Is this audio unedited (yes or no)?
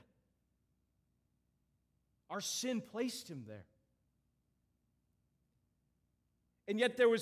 yes